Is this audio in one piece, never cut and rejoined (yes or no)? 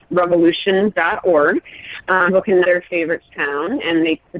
no